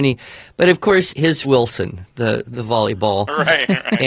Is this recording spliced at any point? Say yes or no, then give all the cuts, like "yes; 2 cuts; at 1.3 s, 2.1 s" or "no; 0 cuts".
yes; 2 cuts; at 1.1 s, 1.4 s